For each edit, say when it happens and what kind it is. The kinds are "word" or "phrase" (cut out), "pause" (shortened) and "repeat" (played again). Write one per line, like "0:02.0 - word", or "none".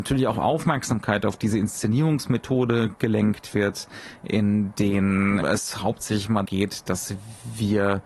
0:05.4 - word
0:06.5 - word